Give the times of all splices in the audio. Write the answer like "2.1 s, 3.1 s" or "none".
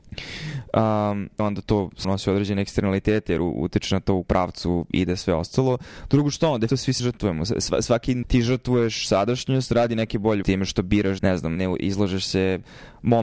1.4 s, 2.0 s, 4.2 s, 6.7 s, 7.0 s, 8.2 s, 10.4 s, 11.2 s, 11.6 s